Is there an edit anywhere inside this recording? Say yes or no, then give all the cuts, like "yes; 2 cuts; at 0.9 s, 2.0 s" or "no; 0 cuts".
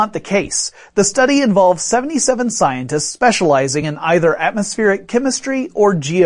no; 0 cuts